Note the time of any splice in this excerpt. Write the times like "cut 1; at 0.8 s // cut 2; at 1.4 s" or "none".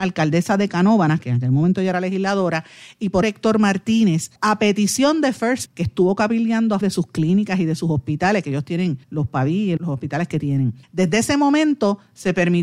cut 1; at 3.2 s // cut 2; at 4.4 s // cut 3; at 5.7 s // cut 4; at 6.8 s // cut 5; at 9.0 s // cut 6; at 9.8 s // cut 7; at 10.8 s